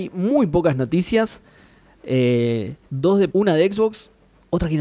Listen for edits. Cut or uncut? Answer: cut